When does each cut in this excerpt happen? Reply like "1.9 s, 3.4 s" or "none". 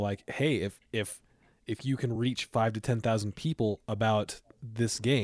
none